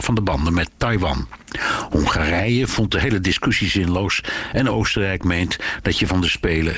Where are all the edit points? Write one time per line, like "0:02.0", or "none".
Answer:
none